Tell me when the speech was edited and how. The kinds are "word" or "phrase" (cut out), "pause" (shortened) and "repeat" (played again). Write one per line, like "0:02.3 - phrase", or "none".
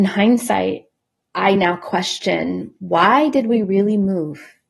none

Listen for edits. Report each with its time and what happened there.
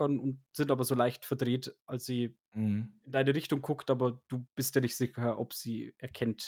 none

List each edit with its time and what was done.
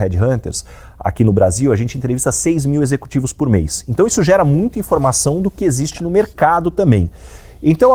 none

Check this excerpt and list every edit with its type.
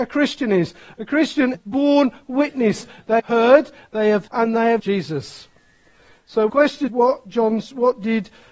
0:01.5 - word
0:03.2 - word
0:04.3 - word
0:04.8 - word
0:06.5 - word
0:06.9 - word

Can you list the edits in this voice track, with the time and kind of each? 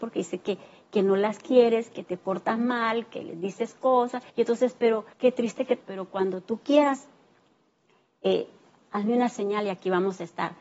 0:04.3 - pause
0:05.1 - pause
0:05.8 - phrase

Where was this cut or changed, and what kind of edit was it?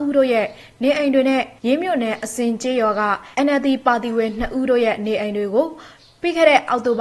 0:01.6 - pause
0:03.3 - pause

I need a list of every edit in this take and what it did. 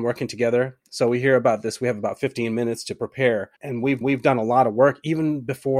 0:03.6 - pause
0:04.0 - repeat

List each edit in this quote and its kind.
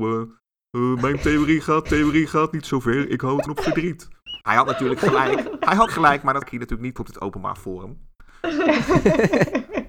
0:01.9 - repeat
0:03.5 - word
0:04.4 - pause
0:05.9 - word
0:06.4 - word
0:07.0 - word

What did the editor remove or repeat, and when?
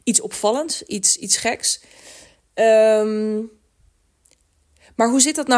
none

